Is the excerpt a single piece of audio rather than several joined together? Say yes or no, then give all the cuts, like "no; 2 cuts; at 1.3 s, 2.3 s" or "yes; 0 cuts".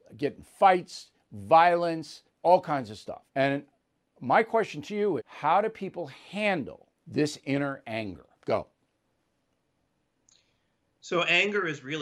no; 5 cuts; at 2.3 s, 3.3 s, 5.2 s, 7.0 s, 8.4 s